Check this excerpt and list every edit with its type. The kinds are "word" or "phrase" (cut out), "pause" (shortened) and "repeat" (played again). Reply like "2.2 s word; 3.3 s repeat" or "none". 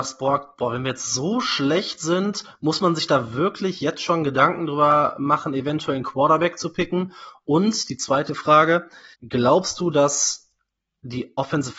9.1 s pause